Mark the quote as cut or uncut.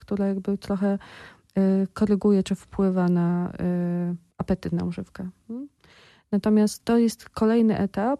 uncut